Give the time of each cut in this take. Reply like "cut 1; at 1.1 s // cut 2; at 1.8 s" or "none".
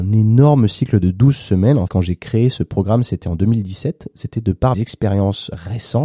cut 1; at 1.9 s // cut 2; at 4.7 s